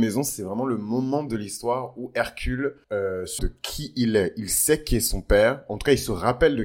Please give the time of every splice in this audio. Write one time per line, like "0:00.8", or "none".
0:02.8
0:03.4